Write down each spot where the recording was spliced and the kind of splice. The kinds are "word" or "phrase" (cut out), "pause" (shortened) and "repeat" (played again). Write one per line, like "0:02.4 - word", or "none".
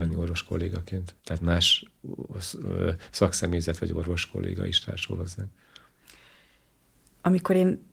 0:01.2 - pause